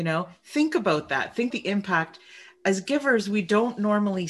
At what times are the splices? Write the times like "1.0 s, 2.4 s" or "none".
1.5 s